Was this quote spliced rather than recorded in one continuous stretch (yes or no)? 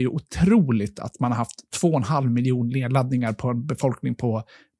no